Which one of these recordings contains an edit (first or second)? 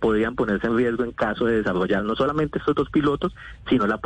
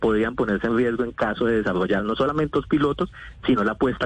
second